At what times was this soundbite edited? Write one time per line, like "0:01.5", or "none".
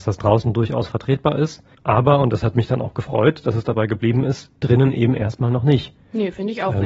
0:01.7